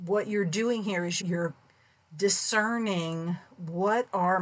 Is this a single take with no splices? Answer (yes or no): no